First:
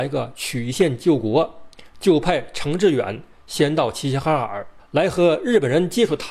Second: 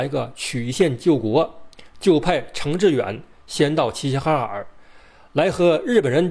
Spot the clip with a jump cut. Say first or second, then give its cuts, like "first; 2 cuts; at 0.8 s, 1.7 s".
first; 1 cut; at 4.8 s